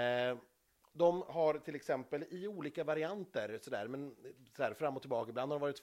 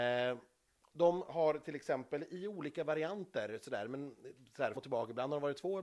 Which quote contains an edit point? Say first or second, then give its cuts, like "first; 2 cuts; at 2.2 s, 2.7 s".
second; 1 cut; at 4.7 s